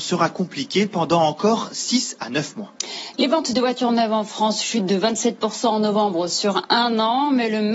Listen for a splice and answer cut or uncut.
uncut